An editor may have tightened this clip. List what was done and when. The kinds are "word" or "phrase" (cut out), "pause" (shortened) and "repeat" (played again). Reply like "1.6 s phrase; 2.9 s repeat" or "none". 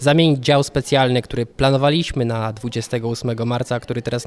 1.5 s pause